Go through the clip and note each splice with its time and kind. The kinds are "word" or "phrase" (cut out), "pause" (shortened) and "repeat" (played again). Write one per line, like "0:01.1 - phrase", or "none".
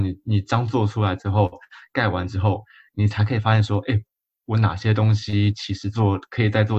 none